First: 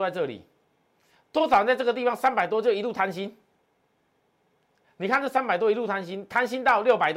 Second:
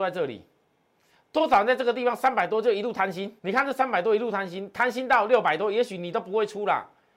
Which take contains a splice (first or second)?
second